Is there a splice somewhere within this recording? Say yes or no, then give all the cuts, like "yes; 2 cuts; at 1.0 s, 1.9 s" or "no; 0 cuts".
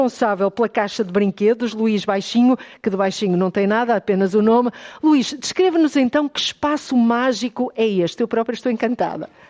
no; 0 cuts